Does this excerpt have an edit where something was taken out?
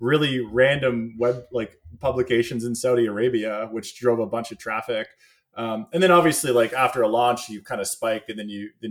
no; 0 cuts

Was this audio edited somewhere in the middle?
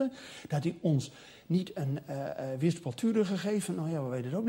no; 0 cuts

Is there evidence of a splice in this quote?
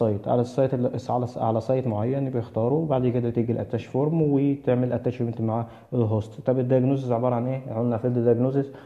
no; 0 cuts

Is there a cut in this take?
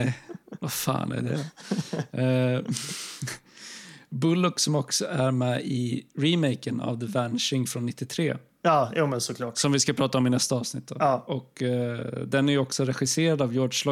no; 0 cuts

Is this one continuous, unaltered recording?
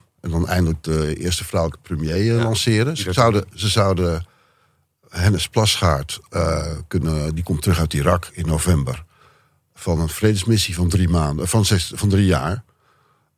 yes; 0 cuts

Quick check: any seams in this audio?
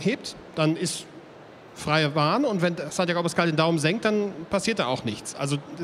no; 0 cuts

